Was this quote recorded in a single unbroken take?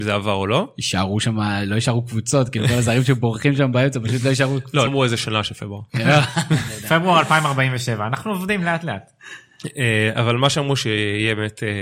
no; 1 cut; at 4.9 s

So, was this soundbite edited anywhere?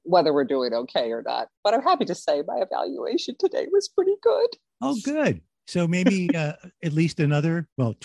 no; 0 cuts

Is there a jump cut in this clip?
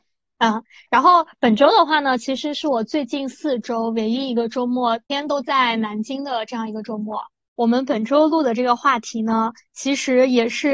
no; 0 cuts

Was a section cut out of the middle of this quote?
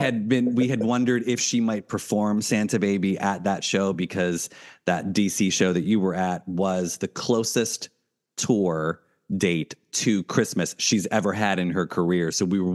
no; 0 cuts

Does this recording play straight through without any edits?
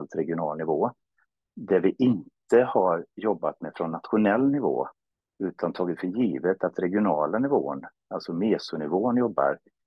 yes; 0 cuts

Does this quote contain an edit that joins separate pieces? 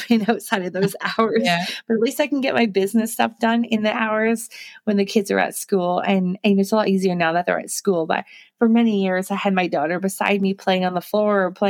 no; 0 cuts

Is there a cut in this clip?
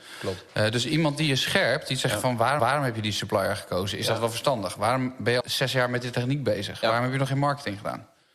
yes; 2 cuts; at 2.6 s, 5.4 s

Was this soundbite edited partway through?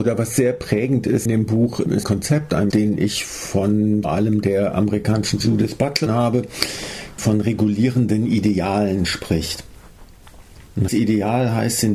yes; 8 cuts; at 1.3 s, 2.0 s, 2.7 s, 4.0 s, 5.4 s, 6.1 s, 7.2 s, 10.9 s

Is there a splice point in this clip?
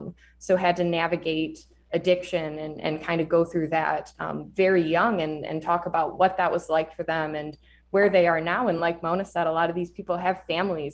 no; 0 cuts

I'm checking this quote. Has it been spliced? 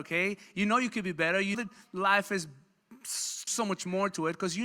yes; 2 cuts; at 1.5 s, 3.5 s

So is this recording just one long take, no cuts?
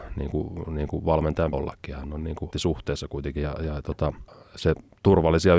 no; 3 cuts; at 1.5 s, 2.5 s, 3.4 s

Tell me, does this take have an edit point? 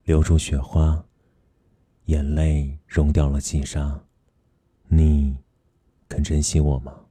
no; 0 cuts

